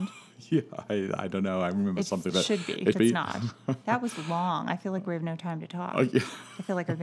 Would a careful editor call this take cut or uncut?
cut